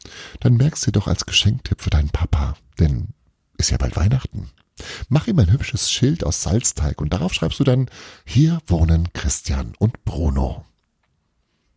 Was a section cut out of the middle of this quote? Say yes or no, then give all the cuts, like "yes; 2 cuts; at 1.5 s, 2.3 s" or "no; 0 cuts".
no; 0 cuts